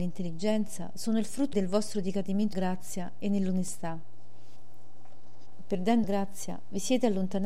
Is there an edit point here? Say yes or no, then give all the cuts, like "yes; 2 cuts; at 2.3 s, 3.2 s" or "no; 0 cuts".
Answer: yes; 3 cuts; at 1.5 s, 2.5 s, 6.0 s